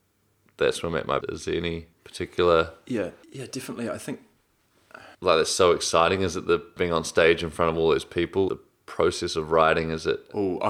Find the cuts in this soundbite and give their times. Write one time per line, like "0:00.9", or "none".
0:01.2
0:01.9
0:03.2
0:05.1
0:06.8
0:08.5